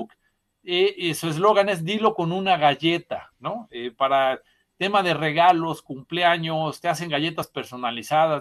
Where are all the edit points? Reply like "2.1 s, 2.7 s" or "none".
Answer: none

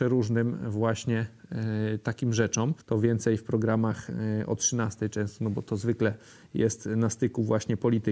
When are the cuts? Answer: 2.8 s

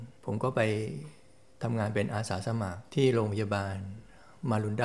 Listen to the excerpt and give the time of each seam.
none

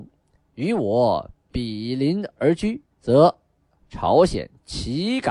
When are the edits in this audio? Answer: 2.9 s

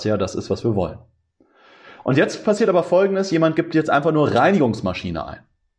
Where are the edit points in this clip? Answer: none

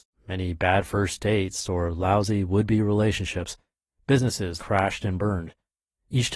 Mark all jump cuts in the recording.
4.6 s

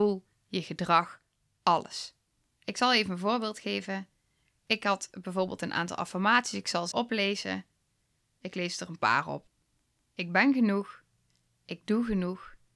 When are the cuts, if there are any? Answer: 6.9 s

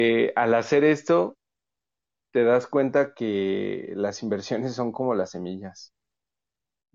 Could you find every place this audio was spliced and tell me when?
none

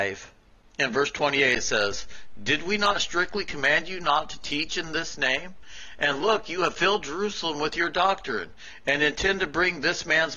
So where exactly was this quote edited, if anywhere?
none

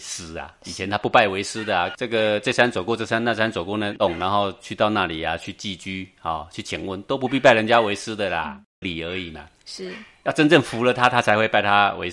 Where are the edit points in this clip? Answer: 8.8 s

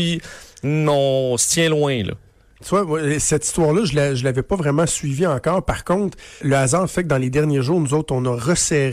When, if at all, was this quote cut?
6.4 s

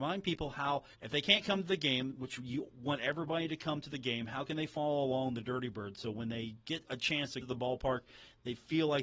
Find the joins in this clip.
0.9 s, 7.4 s

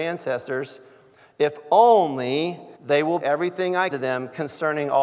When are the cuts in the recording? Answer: 2.8 s, 3.2 s, 3.9 s

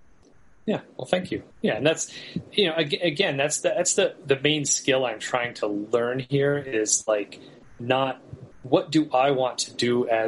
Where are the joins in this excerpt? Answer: 1.5 s

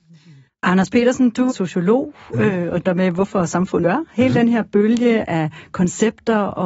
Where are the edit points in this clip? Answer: 1.5 s, 2.8 s, 3.8 s

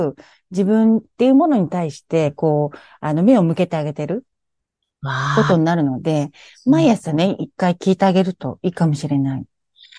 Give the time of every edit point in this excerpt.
none

